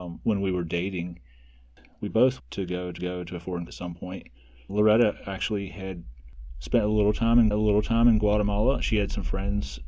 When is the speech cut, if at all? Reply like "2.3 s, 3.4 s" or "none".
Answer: 2.4 s, 3.0 s, 3.7 s, 4.7 s, 7.5 s